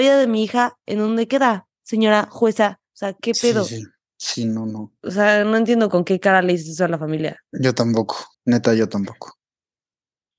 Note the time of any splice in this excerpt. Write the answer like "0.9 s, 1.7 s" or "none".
4.1 s, 8.3 s